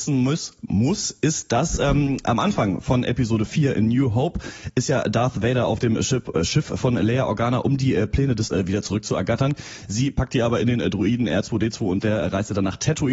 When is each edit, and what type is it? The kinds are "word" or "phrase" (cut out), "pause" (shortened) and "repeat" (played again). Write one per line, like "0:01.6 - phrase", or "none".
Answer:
0:08.5 - word

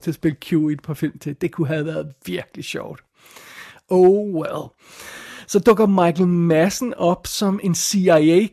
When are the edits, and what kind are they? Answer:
none

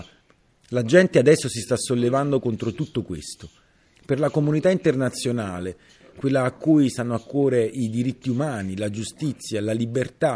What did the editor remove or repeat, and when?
none

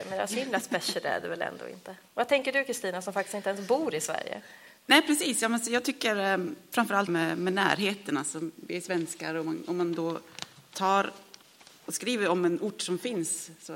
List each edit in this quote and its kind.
0:02.1 - pause
0:07.1 - phrase

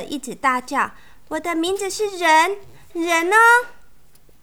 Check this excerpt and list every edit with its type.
0:02.9 - word

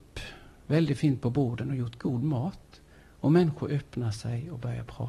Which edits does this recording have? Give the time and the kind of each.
none

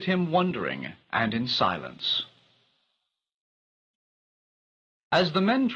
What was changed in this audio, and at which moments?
0:01.0 - pause

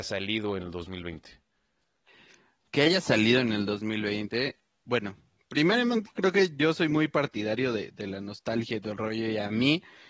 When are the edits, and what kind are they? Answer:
none

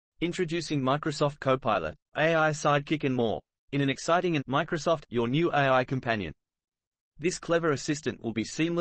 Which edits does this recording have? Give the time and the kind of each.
0:02.1 - word
0:03.6 - pause
0:04.4 - word
0:05.0 - phrase

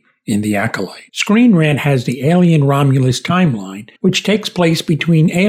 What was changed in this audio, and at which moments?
0:01.1 - pause
0:04.0 - pause

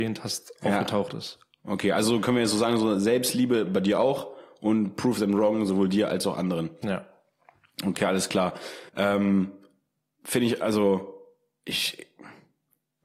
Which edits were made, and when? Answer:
0:08.9 - pause

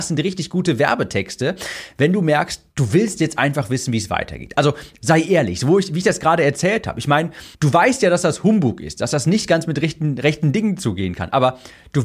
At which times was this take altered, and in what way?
0:07.5 - pause

